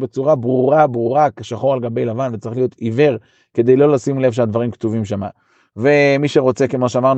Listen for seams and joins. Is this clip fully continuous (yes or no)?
yes